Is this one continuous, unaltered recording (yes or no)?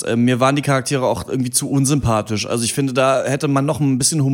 yes